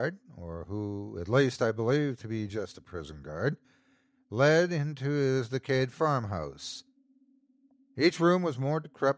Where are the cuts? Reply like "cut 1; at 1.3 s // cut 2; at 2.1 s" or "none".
none